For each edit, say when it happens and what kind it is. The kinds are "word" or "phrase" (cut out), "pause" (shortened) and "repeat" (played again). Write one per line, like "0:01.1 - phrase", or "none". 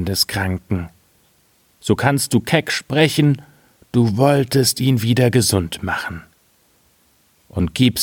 none